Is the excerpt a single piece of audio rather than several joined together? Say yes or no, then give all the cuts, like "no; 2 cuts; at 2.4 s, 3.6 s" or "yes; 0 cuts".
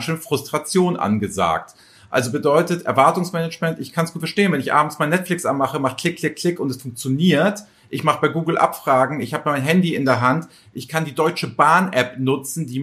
yes; 0 cuts